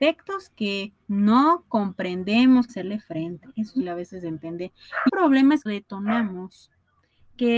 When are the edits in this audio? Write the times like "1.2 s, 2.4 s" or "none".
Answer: 1.0 s, 2.7 s, 3.8 s, 5.1 s, 5.7 s

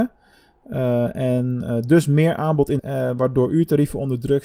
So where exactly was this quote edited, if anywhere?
2.8 s

